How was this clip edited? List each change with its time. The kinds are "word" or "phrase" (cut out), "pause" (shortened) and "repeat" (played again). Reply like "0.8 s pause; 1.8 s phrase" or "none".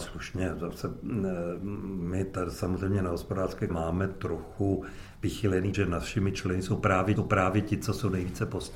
3.7 s word; 5.7 s word; 7.2 s repeat